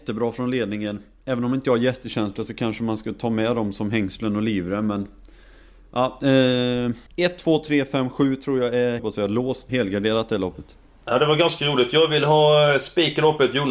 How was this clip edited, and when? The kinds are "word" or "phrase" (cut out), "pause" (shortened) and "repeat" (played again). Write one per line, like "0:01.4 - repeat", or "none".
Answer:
0:07.1 - pause
0:09.0 - phrase
0:09.7 - word